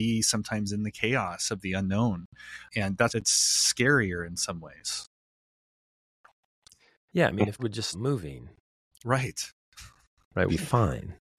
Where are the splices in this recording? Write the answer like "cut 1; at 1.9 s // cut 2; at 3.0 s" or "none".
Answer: cut 1; at 2.7 s // cut 2; at 3.1 s // cut 3; at 7.6 s // cut 4; at 7.9 s // cut 5; at 10.5 s

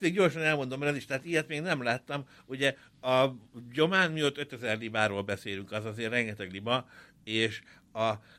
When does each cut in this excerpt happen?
none

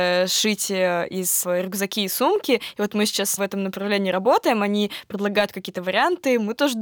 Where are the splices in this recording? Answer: cut 1; at 1.4 s // cut 2; at 3.4 s

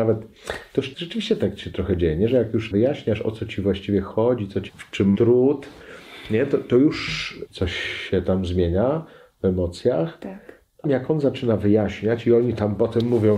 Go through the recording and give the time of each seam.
cut 1; at 0.9 s // cut 2; at 2.7 s // cut 3; at 4.7 s // cut 4; at 5.1 s // cut 5; at 7.5 s // cut 6; at 10.8 s

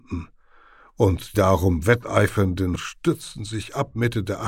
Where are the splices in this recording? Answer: cut 1; at 1.3 s // cut 2; at 2.8 s

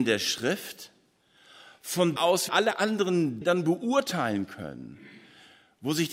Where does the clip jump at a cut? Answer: cut 1; at 2.2 s // cut 2; at 2.5 s // cut 3; at 3.4 s

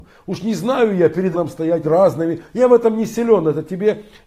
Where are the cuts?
cut 1; at 1.3 s // cut 2; at 1.8 s

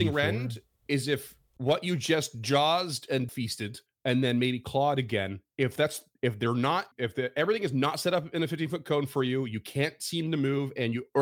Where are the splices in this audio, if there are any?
cut 1; at 3.3 s // cut 2; at 3.9 s // cut 3; at 6.9 s

